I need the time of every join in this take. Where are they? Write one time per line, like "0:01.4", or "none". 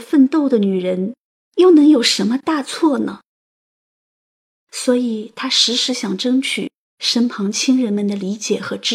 none